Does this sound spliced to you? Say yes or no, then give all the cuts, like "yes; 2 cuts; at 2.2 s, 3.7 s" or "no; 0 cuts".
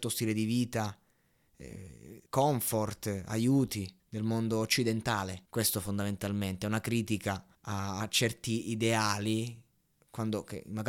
yes; 5 cuts; at 2.3 s, 4.0 s, 5.5 s, 7.5 s, 9.9 s